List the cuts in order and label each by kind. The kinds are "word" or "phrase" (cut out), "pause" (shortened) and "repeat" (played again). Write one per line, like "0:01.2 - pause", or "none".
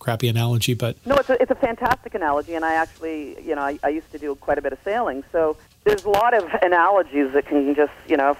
0:05.7 - pause